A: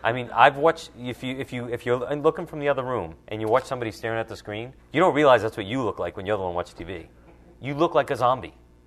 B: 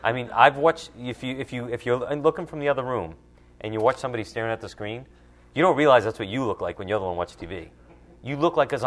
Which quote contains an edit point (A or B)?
A